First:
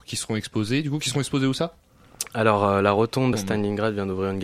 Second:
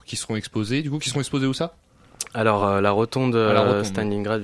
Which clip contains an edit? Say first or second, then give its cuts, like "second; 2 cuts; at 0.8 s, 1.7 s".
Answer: first; 1 cut; at 3.3 s